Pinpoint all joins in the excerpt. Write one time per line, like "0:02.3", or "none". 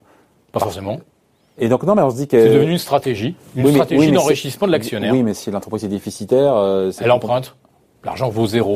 none

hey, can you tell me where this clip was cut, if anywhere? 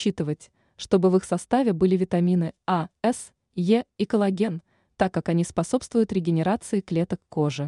none

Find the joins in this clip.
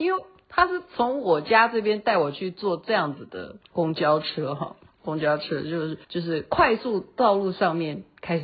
0:03.6
0:06.0

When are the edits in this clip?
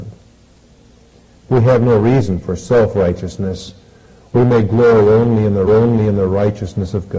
0:05.7

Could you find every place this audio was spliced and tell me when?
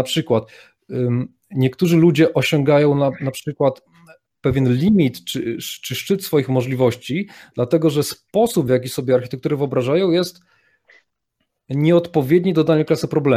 none

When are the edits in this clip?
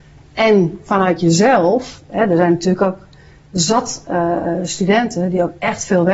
none

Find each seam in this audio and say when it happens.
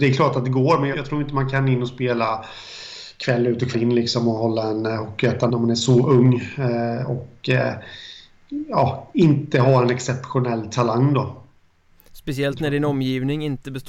0:00.9
0:03.7
0:05.5

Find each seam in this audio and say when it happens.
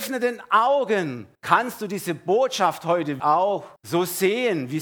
0:01.3
0:03.2
0:03.8

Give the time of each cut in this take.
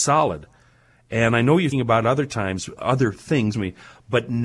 0:01.7
0:02.8
0:03.5

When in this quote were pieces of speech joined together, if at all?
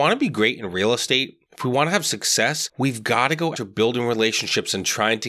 0:01.5
0:03.6

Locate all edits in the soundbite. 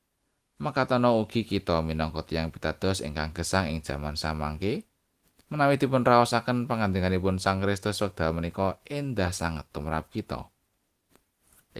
none

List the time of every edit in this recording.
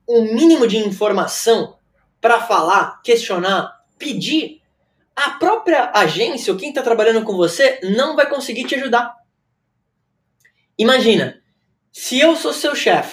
none

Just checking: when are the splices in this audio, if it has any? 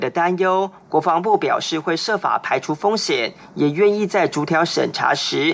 none

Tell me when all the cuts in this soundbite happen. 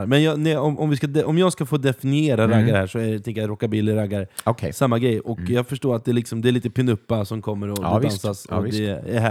none

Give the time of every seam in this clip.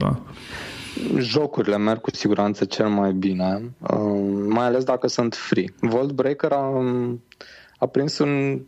none

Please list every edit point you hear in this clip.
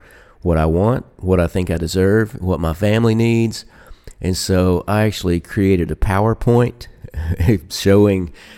none

